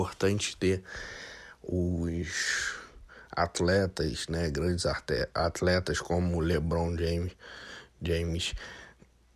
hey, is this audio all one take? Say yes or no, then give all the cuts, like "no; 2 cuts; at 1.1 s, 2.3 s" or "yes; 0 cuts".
yes; 0 cuts